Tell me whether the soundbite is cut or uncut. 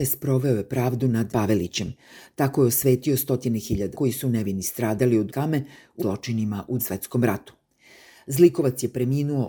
cut